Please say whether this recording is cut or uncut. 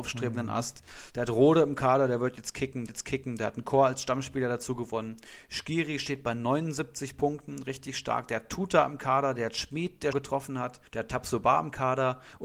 cut